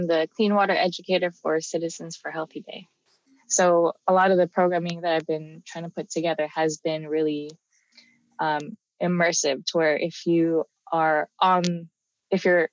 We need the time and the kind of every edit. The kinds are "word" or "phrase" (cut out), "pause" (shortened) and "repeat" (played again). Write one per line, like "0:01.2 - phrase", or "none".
none